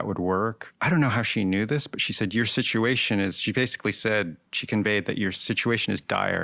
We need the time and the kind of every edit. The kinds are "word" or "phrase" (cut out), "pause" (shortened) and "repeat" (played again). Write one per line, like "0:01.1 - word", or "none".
0:04.5 - pause

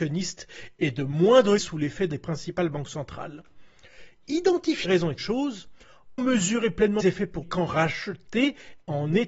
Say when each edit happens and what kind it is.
0:01.6 - word
0:02.1 - word
0:04.8 - word
0:05.2 - word
0:06.2 - word
0:07.0 - word
0:07.4 - word

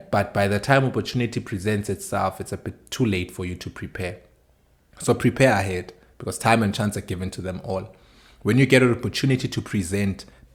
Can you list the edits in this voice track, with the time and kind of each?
none

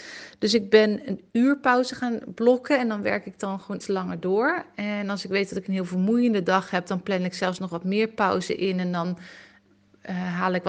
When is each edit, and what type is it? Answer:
0:03.8 - word

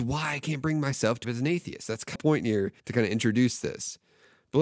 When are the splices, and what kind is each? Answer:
0:01.2 - word
0:02.1 - phrase
0:02.8 - pause

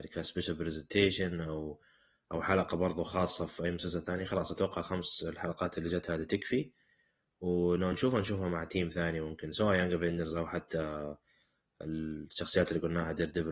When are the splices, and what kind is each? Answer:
none

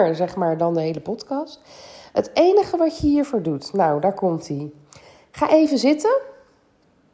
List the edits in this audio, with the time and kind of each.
none

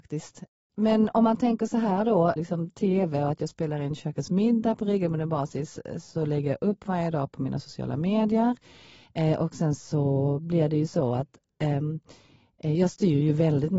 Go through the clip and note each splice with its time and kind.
0:02.4 - word

